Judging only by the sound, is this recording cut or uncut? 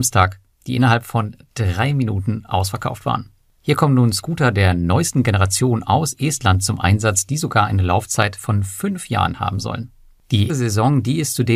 cut